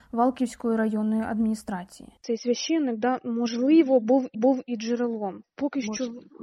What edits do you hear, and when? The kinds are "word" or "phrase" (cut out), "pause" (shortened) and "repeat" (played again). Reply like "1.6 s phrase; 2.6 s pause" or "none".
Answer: 2.2 s pause; 4.3 s repeat